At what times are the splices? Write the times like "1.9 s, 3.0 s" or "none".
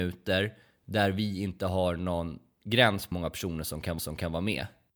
3.1 s, 4.0 s